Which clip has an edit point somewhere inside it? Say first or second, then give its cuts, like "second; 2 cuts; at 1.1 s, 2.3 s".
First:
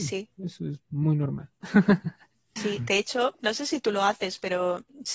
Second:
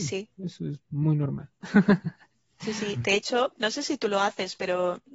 first; 1 cut; at 2.6 s